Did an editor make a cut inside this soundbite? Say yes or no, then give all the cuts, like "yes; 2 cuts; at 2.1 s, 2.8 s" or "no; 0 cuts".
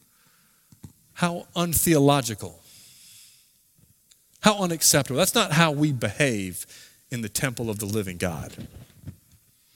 no; 0 cuts